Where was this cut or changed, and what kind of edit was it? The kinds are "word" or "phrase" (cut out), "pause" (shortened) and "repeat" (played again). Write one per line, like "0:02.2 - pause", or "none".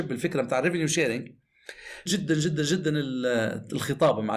0:02.1 - phrase